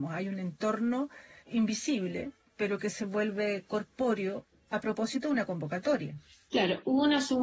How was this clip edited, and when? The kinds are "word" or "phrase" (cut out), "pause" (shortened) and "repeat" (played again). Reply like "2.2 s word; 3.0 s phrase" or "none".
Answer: none